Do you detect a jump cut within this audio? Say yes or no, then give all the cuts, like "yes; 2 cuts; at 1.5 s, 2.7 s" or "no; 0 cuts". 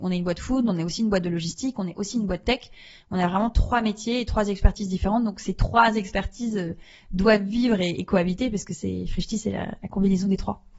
no; 0 cuts